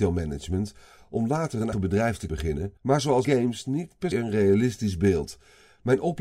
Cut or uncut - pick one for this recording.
cut